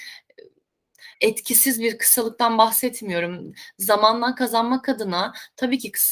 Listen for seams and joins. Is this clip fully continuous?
no; 1 cut; at 1.1 s

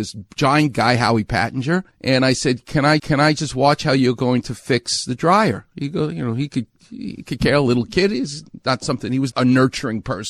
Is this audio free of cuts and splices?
no; 2 cuts; at 3.0 s, 9.3 s

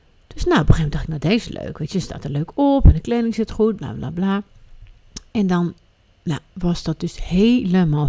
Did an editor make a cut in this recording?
no; 0 cuts

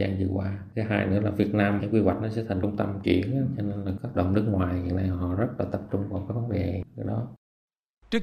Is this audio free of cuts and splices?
no; 3 cuts; at 1.8 s, 3.0 s, 4.1 s

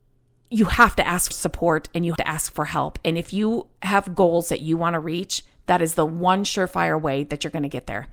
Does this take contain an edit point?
yes; 2 cuts; at 1.3 s, 2.2 s

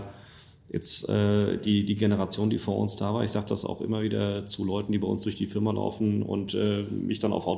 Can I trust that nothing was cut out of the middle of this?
yes; 0 cuts

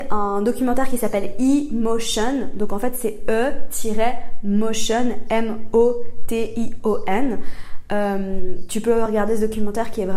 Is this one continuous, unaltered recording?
yes; 0 cuts

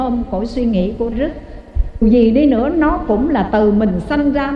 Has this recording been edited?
yes; 2 cuts; at 1.1 s, 2.0 s

